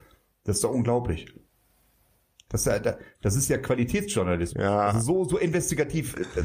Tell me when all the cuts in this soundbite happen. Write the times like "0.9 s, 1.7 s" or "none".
none